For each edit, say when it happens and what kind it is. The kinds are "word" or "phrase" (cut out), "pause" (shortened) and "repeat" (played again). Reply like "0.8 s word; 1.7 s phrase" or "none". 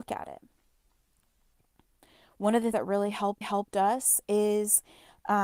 2.7 s word; 3.4 s repeat